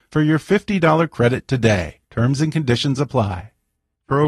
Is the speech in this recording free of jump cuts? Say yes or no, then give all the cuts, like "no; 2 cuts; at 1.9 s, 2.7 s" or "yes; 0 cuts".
no; 1 cut; at 2.0 s